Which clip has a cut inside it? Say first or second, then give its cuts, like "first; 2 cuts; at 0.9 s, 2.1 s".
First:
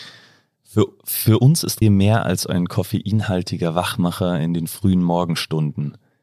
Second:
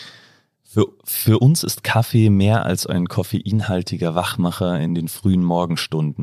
first; 1 cut; at 1.8 s